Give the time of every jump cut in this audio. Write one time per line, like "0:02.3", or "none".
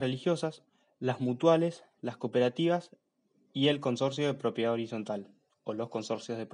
none